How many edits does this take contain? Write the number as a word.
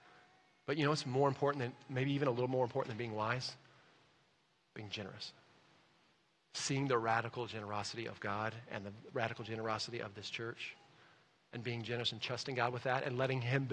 zero